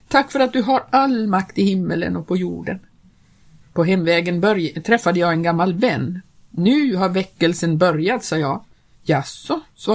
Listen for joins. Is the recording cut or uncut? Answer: uncut